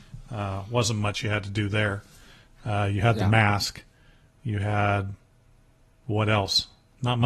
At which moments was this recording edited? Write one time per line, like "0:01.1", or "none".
none